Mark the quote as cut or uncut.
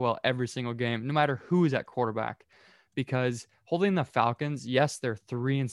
uncut